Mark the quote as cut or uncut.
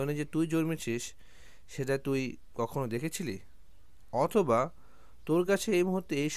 uncut